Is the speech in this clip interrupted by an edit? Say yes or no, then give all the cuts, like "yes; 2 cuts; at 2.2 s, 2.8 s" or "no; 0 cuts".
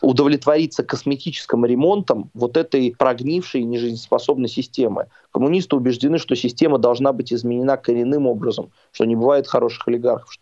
no; 0 cuts